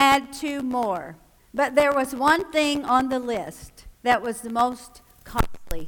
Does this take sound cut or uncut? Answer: cut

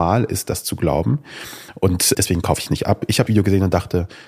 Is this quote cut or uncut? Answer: cut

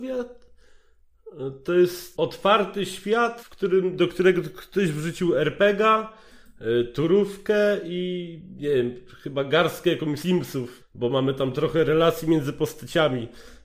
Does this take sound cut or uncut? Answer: cut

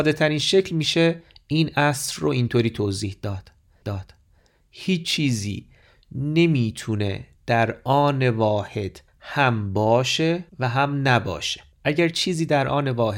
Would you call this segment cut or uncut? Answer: cut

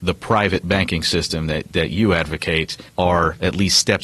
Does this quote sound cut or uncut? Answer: cut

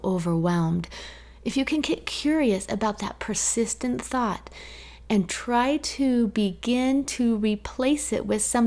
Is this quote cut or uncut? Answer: uncut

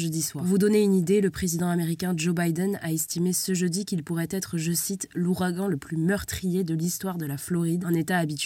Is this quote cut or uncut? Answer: uncut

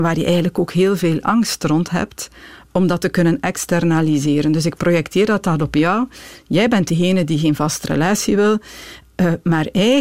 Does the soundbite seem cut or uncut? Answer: uncut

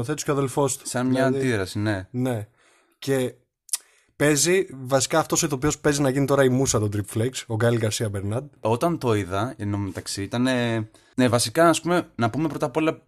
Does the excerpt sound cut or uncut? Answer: uncut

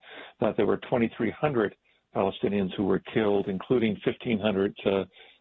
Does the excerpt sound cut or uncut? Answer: uncut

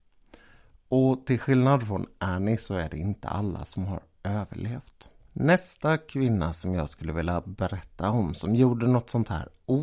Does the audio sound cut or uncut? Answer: cut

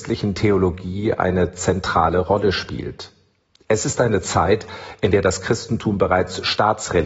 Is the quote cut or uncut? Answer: uncut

